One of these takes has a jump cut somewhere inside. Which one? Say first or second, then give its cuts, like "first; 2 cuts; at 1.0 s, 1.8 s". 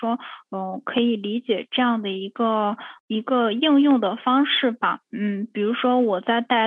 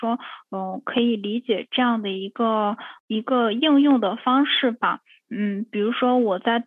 first; 1 cut; at 5.0 s